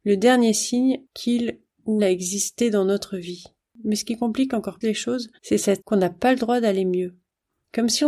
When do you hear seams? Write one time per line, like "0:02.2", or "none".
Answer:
0:02.0
0:03.6
0:04.8
0:05.4
0:05.8